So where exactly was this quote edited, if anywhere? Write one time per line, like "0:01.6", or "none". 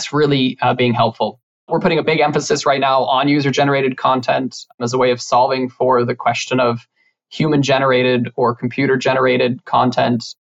none

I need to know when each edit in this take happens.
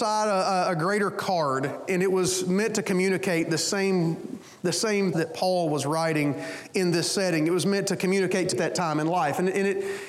0:01.9
0:05.1
0:08.5

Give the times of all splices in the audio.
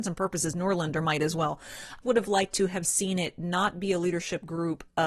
0:02.0

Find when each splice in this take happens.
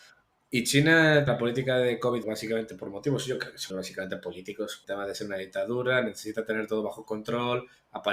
0:01.3
0:02.2
0:03.7
0:04.8

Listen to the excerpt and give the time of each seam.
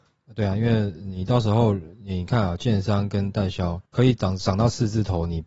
0:03.9

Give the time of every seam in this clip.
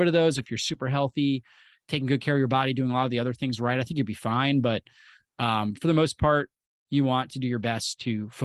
none

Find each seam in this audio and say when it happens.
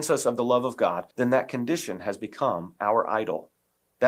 0:01.1

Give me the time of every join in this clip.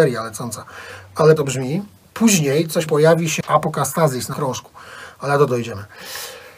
0:01.4
0:02.9
0:03.4
0:04.3
0:05.5

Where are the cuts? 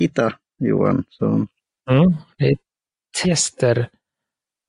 0:03.2

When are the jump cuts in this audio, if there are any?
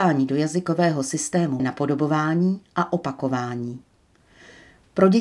0:01.6

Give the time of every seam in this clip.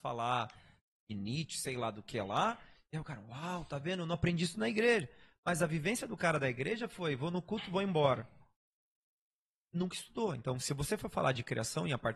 none

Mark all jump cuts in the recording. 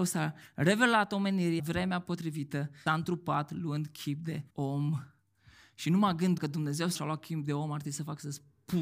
0:01.6
0:02.9
0:04.5
0:06.4
0:07.0

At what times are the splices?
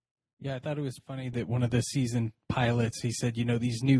0:01.0

